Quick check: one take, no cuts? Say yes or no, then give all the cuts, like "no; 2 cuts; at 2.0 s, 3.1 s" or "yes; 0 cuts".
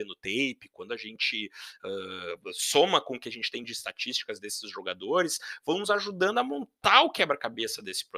yes; 0 cuts